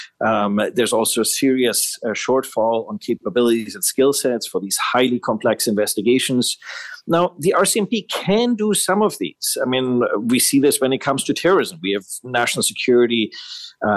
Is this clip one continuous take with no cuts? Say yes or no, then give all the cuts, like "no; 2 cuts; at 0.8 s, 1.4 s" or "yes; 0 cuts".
yes; 0 cuts